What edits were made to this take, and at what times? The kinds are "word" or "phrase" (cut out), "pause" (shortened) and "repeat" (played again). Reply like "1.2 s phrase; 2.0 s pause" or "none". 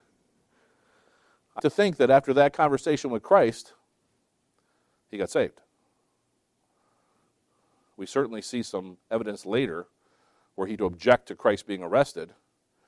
1.6 s word; 10.8 s word